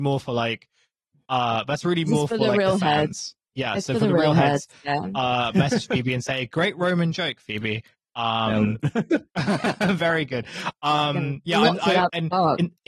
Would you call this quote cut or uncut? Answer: uncut